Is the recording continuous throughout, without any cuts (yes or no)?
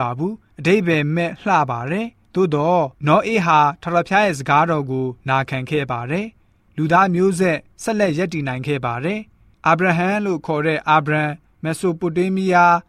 no